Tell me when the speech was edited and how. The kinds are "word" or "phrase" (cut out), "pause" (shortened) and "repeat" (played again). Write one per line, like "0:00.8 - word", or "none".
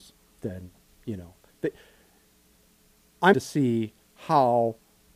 0:03.3 - word